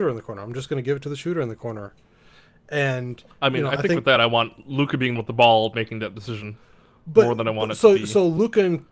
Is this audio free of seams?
no; 2 cuts; at 3.3 s, 5.2 s

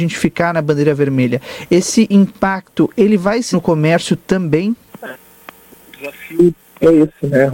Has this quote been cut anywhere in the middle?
yes; 2 cuts; at 3.5 s, 4.9 s

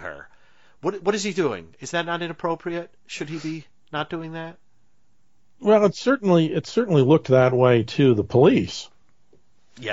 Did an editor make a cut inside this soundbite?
no; 0 cuts

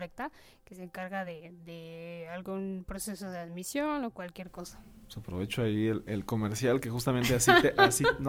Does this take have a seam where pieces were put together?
no; 0 cuts

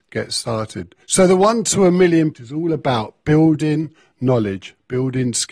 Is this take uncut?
no; 2 cuts; at 1.0 s, 2.3 s

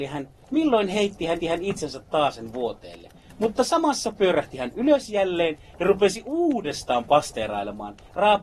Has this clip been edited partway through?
yes; 1 cut; at 1.4 s

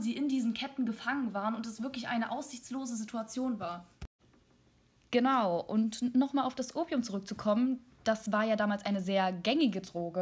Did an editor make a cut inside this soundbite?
no; 0 cuts

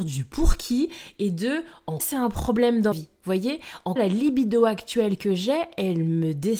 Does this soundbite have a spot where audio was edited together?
yes; 3 cuts; at 2.0 s, 2.9 s, 4.0 s

